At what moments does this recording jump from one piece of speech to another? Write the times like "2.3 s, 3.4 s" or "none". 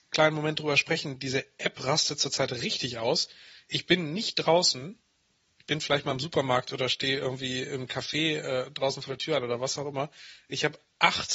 none